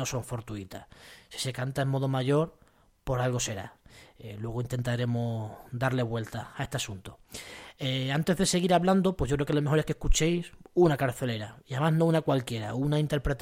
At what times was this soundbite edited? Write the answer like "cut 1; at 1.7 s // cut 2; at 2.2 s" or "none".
none

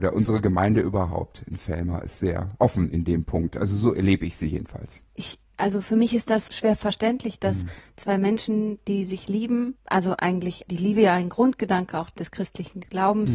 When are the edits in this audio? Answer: cut 1; at 6.5 s

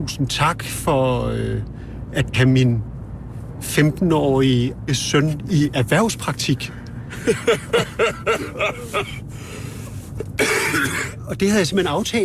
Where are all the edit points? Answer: cut 1; at 2.3 s // cut 2; at 4.9 s

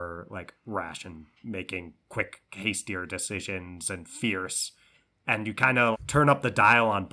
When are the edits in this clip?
cut 1; at 5.9 s

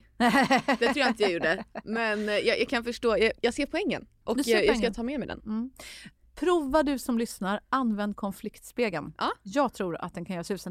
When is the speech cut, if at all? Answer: none

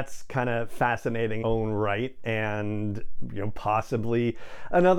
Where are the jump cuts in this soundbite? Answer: cut 1; at 1.4 s

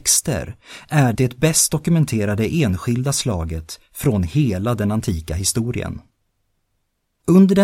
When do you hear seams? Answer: cut 1; at 1.1 s

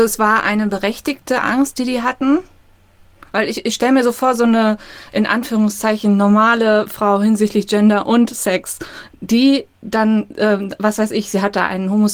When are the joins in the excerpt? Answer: none

